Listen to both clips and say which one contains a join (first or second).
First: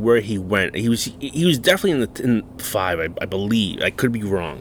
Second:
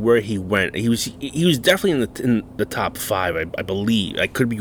first